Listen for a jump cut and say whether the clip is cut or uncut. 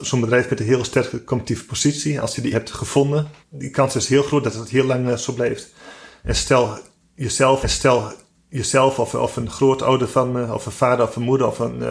cut